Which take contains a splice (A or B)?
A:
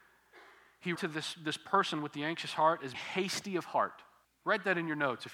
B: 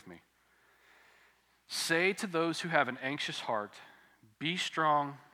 A